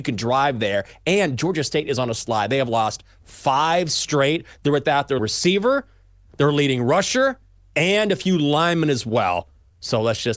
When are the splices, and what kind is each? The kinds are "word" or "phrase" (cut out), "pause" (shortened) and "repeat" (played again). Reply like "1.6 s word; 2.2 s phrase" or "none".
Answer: 5.2 s word